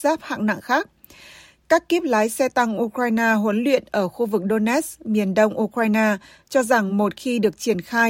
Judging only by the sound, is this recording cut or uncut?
uncut